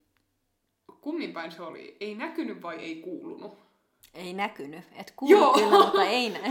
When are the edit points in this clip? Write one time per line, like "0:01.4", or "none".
none